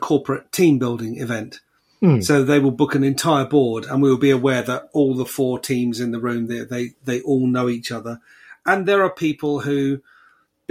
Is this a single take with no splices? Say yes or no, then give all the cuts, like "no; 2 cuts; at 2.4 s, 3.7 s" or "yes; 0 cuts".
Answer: yes; 0 cuts